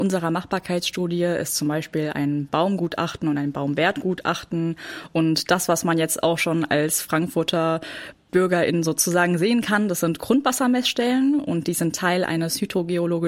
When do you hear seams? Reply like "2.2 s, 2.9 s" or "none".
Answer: none